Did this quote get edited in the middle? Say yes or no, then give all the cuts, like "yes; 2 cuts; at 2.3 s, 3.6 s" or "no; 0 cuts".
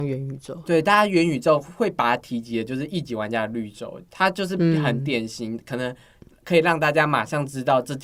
no; 0 cuts